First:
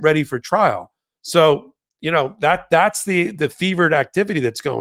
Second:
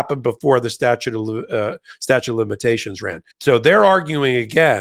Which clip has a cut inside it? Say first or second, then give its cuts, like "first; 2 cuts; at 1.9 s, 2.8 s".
second; 1 cut; at 3.3 s